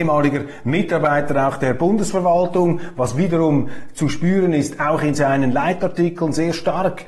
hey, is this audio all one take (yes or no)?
yes